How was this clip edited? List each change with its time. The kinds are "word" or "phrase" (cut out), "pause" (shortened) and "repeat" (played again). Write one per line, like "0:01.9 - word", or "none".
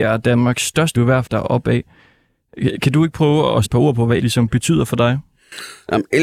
0:00.9 - word
0:01.3 - word
0:03.6 - word
0:04.2 - word